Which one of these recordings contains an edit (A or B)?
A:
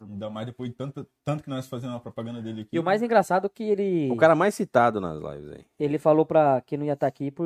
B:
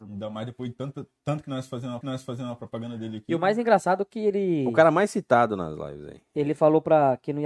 B